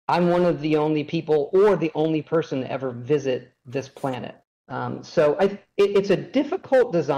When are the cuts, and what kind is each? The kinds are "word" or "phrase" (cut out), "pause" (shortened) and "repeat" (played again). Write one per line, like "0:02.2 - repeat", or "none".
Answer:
0:04.4 - pause